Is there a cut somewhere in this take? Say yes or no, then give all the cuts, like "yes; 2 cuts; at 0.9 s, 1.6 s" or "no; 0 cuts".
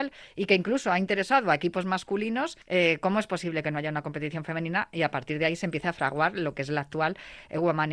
yes; 1 cut; at 2.6 s